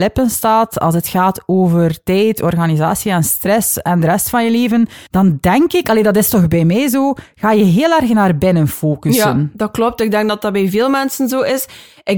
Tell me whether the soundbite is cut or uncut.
cut